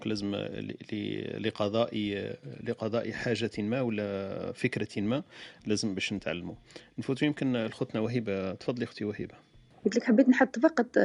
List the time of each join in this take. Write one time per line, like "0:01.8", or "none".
none